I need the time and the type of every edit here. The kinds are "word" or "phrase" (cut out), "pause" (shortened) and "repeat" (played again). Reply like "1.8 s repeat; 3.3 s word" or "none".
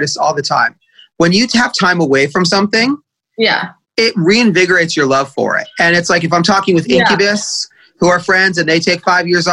3.8 s pause